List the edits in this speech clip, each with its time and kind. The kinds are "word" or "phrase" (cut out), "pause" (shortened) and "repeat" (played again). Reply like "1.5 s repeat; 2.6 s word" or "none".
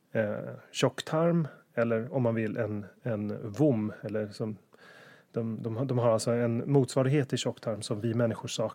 none